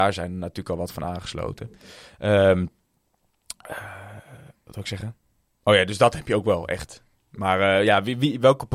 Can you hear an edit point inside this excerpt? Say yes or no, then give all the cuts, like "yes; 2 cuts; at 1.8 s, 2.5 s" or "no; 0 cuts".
no; 0 cuts